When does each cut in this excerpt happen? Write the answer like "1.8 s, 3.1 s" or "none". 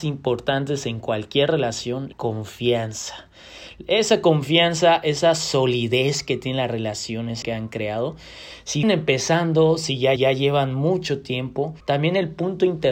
2.1 s, 7.4 s, 8.8 s, 10.2 s, 11.8 s